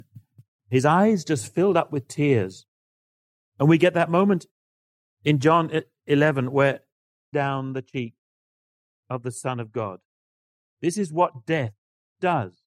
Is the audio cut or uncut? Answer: cut